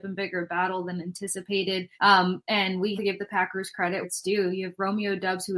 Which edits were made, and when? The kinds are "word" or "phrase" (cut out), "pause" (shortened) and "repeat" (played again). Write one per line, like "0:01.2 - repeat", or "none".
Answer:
0:01.9 - pause
0:03.0 - word
0:04.0 - word